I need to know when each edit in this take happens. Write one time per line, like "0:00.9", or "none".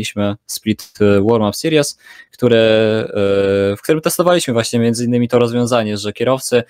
none